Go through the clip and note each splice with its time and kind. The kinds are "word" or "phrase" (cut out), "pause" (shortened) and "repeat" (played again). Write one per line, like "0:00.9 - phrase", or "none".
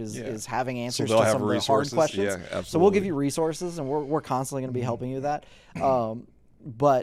none